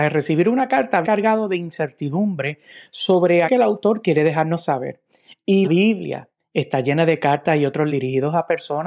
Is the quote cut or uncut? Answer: cut